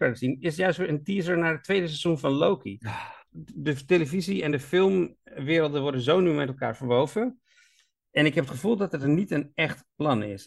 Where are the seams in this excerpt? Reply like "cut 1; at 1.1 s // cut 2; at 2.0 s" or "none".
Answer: none